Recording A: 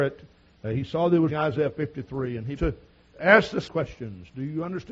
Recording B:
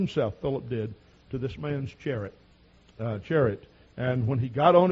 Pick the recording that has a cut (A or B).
A